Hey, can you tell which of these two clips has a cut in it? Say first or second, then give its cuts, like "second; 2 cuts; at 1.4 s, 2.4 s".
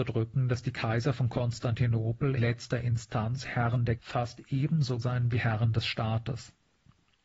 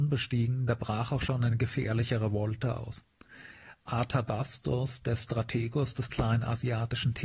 first; 3 cuts; at 2.4 s, 4.0 s, 5.0 s